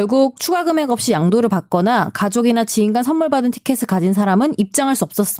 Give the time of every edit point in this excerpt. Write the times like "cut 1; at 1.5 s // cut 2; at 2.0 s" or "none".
none